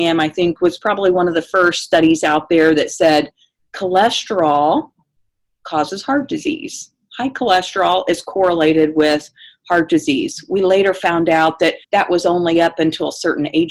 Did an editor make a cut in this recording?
yes; 1 cut; at 11.8 s

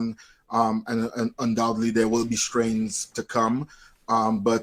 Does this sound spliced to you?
yes; 1 cut; at 3.1 s

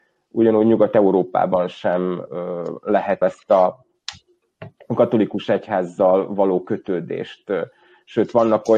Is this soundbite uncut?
no; 2 cuts; at 2.3 s, 3.2 s

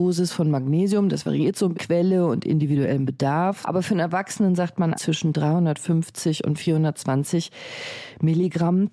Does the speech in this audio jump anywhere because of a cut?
yes; 3 cuts; at 1.7 s, 3.6 s, 4.9 s

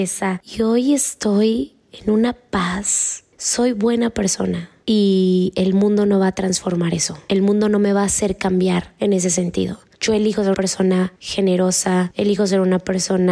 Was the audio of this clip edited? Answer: yes; 1 cut; at 10.5 s

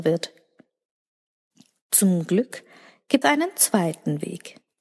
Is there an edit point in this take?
yes; 1 cut; at 3.2 s

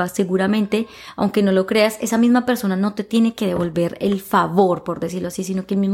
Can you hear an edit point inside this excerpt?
no; 0 cuts

